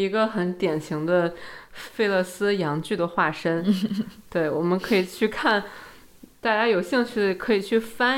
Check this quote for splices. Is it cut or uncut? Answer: uncut